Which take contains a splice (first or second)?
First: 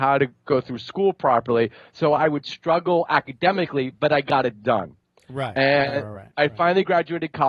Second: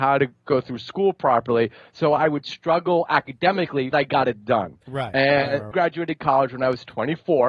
second